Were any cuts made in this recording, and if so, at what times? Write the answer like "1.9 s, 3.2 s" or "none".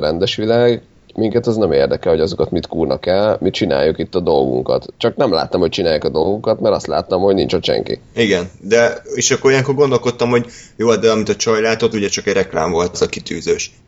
11.9 s, 12.9 s